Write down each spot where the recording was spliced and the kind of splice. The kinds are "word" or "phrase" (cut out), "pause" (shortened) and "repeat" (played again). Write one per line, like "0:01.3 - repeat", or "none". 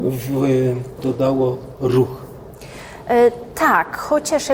0:01.0 - word